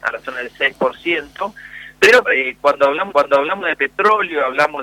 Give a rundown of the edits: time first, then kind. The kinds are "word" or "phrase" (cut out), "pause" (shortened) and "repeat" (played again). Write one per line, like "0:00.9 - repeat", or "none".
0:02.2 - word
0:03.1 - repeat